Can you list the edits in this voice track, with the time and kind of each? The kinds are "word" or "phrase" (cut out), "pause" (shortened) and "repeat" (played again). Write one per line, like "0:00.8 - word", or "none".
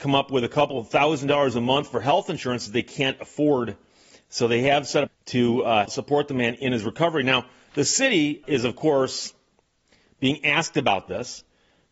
0:05.1 - phrase
0:05.9 - word
0:08.4 - word